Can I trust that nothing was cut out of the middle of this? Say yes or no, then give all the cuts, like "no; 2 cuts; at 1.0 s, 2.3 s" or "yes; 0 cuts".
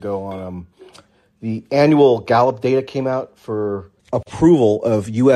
no; 1 cut; at 4.0 s